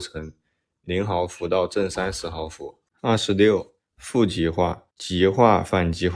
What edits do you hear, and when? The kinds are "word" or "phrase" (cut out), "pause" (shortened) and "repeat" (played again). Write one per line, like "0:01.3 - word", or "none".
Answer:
0:02.9 - pause
0:04.9 - pause